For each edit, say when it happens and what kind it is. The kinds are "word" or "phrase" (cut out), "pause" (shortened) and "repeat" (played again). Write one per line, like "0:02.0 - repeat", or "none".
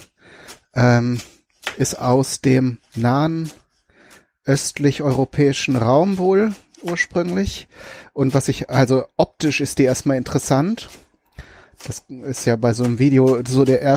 none